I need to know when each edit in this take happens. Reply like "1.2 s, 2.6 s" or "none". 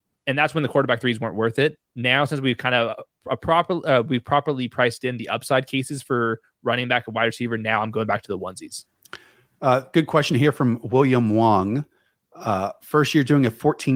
none